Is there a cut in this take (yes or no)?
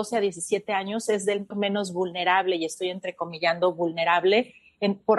yes